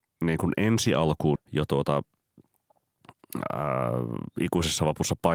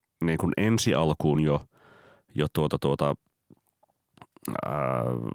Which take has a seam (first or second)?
first